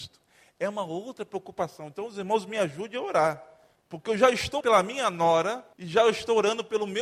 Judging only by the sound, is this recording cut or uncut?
cut